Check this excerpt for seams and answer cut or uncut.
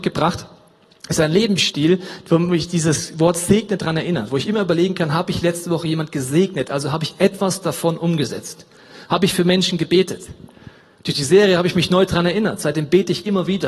uncut